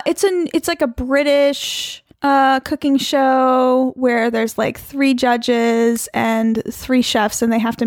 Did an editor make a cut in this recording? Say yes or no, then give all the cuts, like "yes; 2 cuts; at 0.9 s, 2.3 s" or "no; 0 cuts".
yes; 1 cut; at 2.1 s